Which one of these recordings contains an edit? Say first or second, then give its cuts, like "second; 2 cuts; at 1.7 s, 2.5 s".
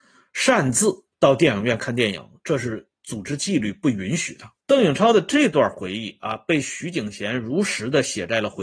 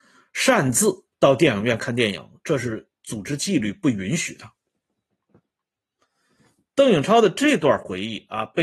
first; 1 cut; at 4.6 s